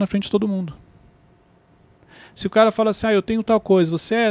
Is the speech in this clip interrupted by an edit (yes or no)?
no